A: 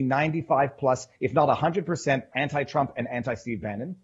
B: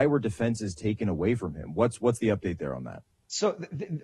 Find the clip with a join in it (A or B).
A